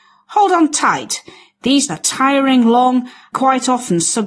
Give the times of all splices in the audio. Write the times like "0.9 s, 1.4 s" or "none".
1.9 s, 3.3 s